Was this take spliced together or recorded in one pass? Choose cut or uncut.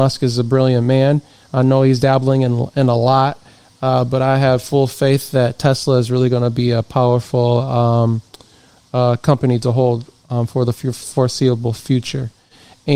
uncut